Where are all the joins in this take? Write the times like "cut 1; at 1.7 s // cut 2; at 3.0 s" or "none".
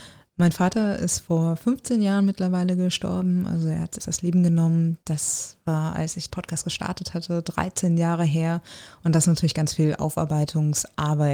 cut 1; at 4.0 s // cut 2; at 6.3 s